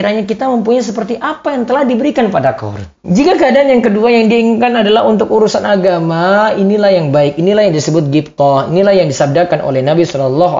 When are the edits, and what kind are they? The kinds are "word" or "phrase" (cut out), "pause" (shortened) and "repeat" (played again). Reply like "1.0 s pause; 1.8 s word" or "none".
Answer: 3.0 s pause